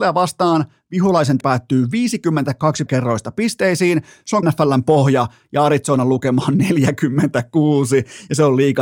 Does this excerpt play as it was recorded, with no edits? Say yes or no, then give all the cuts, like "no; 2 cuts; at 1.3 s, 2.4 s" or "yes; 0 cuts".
no; 3 cuts; at 1.4 s, 2.9 s, 4.4 s